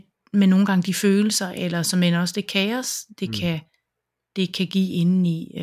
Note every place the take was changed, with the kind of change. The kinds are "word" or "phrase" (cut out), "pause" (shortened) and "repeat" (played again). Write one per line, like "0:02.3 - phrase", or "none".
none